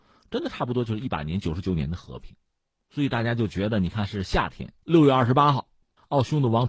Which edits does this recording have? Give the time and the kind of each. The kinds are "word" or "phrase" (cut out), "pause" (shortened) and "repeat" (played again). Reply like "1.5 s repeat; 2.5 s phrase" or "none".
4.8 s pause